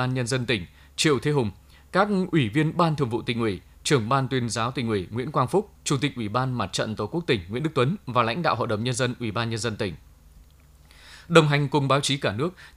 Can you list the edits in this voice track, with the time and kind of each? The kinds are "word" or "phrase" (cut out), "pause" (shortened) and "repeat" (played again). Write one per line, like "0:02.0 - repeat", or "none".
none